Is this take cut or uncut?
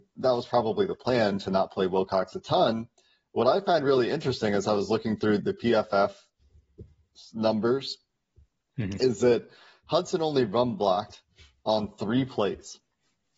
cut